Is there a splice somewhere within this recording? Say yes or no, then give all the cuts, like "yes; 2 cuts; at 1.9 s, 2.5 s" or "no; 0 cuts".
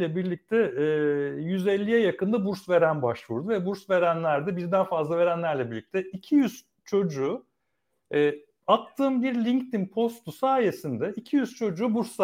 no; 0 cuts